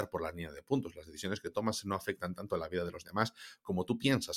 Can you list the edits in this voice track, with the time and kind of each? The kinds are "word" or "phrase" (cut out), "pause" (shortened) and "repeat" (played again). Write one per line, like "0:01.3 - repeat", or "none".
none